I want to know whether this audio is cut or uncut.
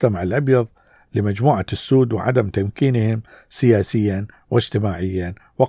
uncut